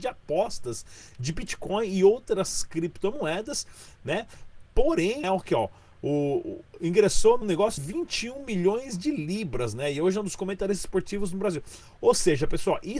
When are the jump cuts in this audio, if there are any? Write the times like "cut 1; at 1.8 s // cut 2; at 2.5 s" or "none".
cut 1; at 5.2 s // cut 2; at 7.4 s // cut 3; at 7.8 s